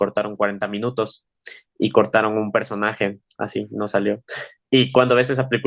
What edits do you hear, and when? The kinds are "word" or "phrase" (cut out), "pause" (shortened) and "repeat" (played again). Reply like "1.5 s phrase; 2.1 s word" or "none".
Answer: 3.3 s word